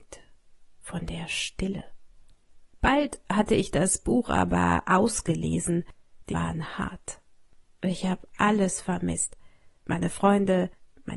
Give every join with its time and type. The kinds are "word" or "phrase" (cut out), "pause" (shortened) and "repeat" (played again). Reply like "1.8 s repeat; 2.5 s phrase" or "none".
6.3 s phrase

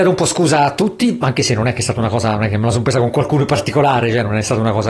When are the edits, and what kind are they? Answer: none

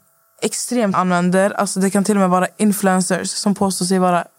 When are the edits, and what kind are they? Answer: 0.9 s word

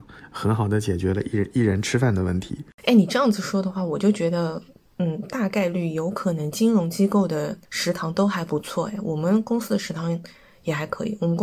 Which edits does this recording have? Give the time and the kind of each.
4.7 s pause; 7.6 s pause

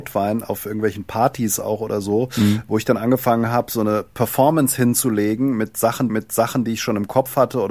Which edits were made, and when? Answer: 6.1 s repeat

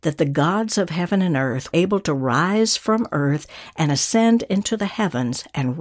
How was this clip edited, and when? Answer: 1.7 s word

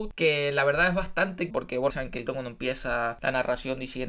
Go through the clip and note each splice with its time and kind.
1.5 s phrase; 1.9 s word; 2.3 s word

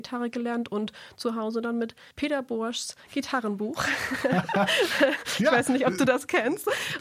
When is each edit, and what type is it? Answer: 2.1 s pause

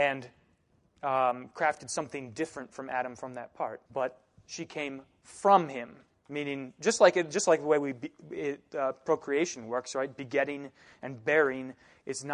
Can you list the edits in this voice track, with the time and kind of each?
3.8 s pause; 6.1 s pause

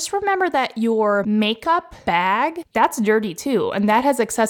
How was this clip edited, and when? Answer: none

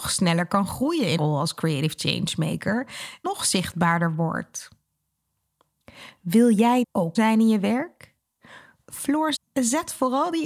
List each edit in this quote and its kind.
1.2 s word; 3.2 s word; 6.8 s word; 7.1 s word; 9.3 s word

